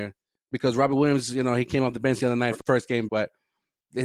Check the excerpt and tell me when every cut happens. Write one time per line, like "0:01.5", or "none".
0:02.6
0:03.1